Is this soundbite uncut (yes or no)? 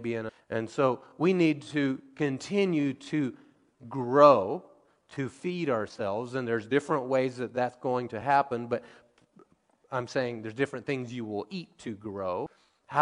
yes